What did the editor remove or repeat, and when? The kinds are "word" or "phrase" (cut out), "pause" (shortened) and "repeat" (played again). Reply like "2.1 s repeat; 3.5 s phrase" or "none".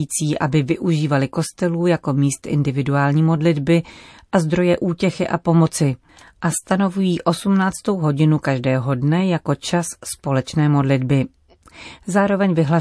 none

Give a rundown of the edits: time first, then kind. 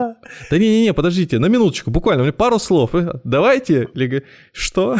none

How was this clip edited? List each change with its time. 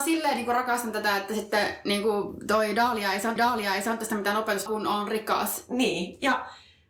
3.4 s repeat; 4.7 s phrase

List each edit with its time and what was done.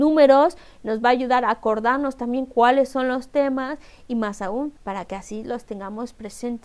4.8 s pause

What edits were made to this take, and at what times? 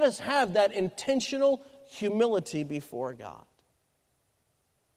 none

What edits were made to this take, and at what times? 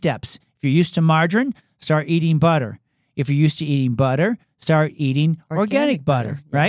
none

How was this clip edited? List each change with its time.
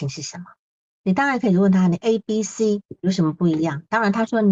3.0 s pause

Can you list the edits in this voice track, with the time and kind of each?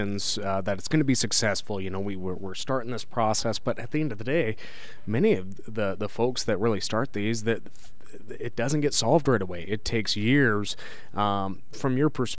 none

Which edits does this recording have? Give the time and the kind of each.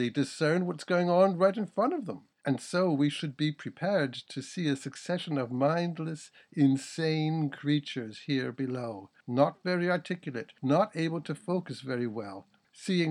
2.3 s pause; 9.2 s pause; 10.6 s pause

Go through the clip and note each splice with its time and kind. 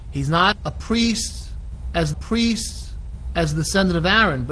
2.1 s repeat

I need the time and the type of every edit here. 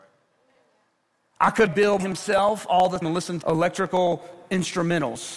1.7 s word; 2.0 s word; 3.0 s word; 3.4 s word

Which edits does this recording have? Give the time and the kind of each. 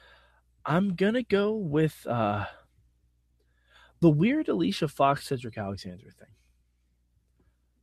none

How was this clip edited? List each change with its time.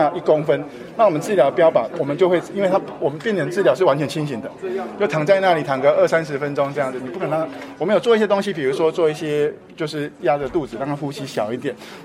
7.0 s phrase

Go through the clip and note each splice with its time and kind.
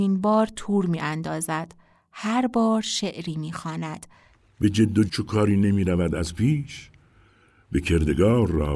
5.1 s word

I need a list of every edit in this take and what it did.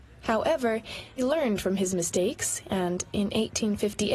1.2 s word

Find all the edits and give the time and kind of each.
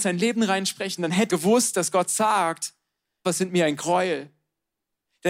1.0 s word; 1.3 s word; 3.2 s word

